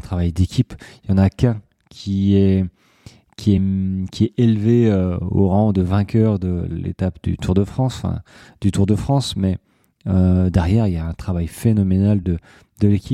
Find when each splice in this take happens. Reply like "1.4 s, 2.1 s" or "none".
none

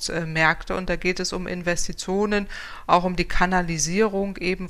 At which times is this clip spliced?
none

